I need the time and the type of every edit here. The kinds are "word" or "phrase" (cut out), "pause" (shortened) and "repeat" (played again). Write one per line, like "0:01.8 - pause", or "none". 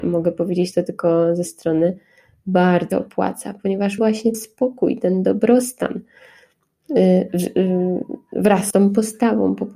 0:01.5 - word
0:02.9 - word
0:04.0 - word
0:04.3 - word
0:08.7 - word